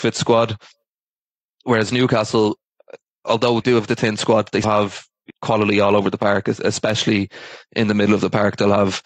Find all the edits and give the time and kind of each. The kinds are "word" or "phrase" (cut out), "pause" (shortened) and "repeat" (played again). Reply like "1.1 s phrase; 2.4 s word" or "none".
3.6 s word; 4.6 s word; 5.3 s word